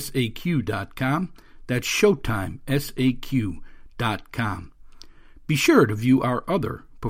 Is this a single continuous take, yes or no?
yes